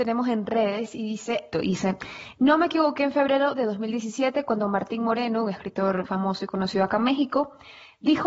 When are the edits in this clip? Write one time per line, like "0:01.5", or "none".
0:01.5
0:06.0